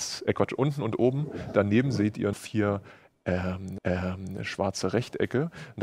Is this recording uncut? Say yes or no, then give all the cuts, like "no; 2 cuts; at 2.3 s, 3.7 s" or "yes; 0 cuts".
no; 2 cuts; at 2.3 s, 3.8 s